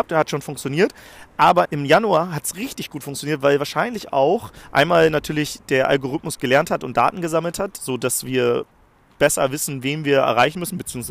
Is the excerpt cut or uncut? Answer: cut